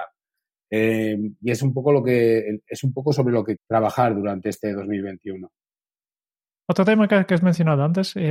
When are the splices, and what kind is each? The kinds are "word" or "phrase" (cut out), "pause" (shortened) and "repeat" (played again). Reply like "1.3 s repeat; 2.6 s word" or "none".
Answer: 3.6 s word